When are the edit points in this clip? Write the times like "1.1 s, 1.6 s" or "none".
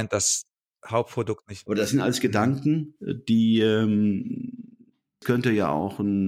none